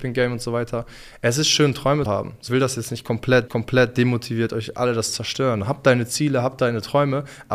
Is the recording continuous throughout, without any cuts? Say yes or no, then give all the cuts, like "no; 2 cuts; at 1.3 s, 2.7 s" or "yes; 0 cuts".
no; 3 cuts; at 2.1 s, 2.5 s, 3.5 s